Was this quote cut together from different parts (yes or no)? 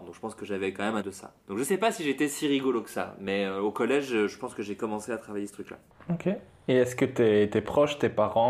yes